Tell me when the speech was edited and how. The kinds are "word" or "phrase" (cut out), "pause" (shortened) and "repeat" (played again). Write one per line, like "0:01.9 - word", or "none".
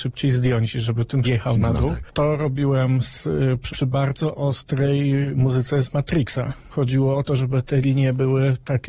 0:01.2 - word
0:03.7 - phrase
0:06.7 - word